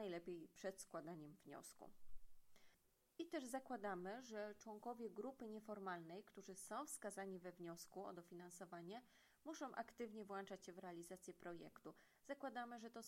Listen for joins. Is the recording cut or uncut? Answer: uncut